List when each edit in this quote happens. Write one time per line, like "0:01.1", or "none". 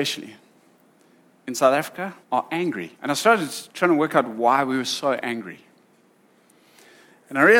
0:02.2
0:03.0
0:03.7